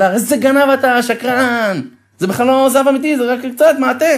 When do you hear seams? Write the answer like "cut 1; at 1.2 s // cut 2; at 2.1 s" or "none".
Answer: none